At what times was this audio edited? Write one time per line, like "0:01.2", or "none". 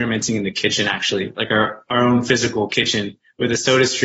none